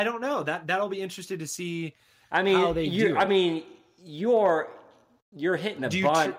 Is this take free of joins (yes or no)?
yes